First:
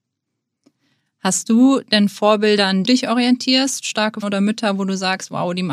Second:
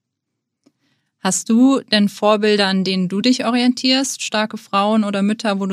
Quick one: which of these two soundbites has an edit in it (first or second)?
first